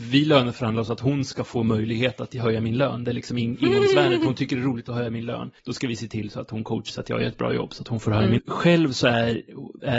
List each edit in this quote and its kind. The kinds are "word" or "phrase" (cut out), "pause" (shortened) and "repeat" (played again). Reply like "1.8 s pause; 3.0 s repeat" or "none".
5.6 s pause; 6.9 s word; 8.4 s word